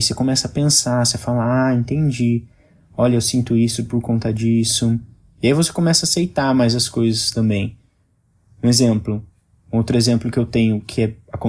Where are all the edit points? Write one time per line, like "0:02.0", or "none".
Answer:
none